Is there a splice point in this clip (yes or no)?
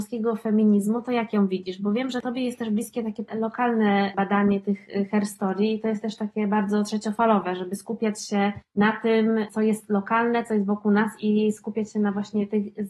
yes